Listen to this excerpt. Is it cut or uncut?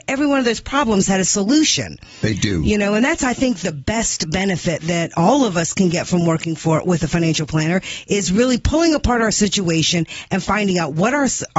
uncut